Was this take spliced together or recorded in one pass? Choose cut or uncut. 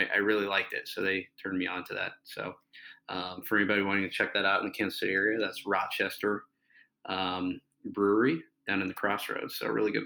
uncut